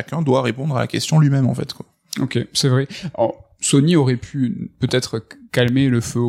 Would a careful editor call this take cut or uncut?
uncut